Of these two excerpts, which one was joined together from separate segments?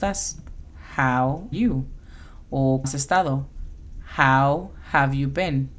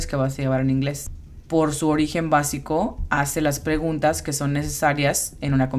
first; 2 cuts; at 1.5 s, 2.8 s

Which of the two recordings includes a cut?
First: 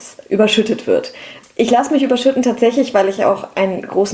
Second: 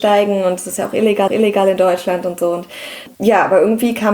second; 2 cuts; at 1.3 s, 3.1 s

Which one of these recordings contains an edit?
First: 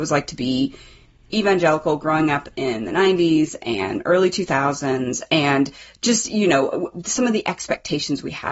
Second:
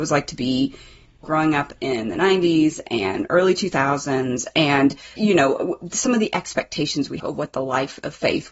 second; 3 cuts; at 1.2 s, 5.2 s, 7.2 s

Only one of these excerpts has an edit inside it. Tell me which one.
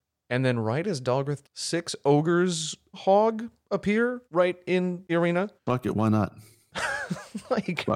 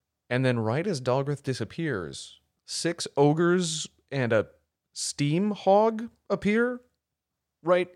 first; 5 cuts; at 1.4 s, 2.9 s, 4.2 s, 5.1 s, 5.6 s

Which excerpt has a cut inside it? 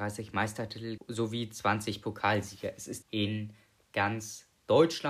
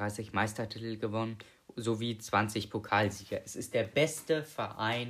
first; 2 cuts; at 1.0 s, 3.0 s

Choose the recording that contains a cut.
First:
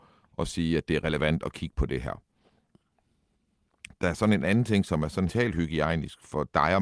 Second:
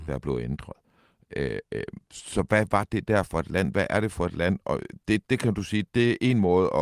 first; 1 cut; at 5.3 s

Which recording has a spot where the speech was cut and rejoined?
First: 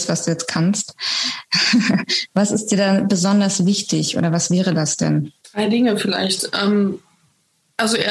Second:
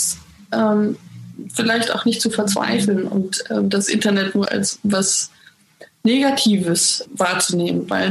second; 2 cuts; at 4.5 s, 7.1 s

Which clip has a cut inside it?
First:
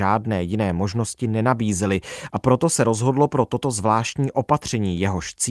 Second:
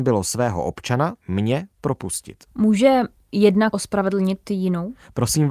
second; 2 cuts; at 1.2 s, 3.7 s

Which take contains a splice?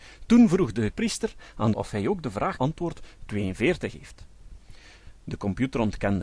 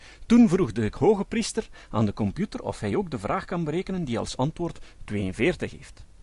first; 3 cuts; at 0.9 s, 1.7 s, 2.6 s

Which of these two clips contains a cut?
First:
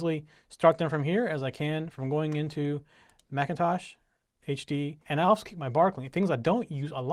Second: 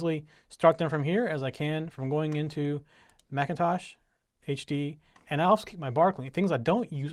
first; 1 cut; at 5.0 s

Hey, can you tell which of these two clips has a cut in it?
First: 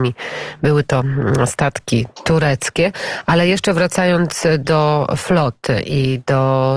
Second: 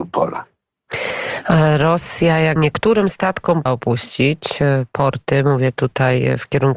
second; 2 cuts; at 2.6 s, 3.7 s

